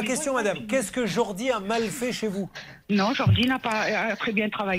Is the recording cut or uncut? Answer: cut